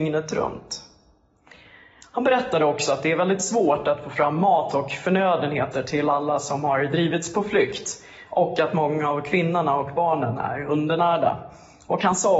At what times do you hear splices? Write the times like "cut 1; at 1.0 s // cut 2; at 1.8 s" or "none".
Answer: none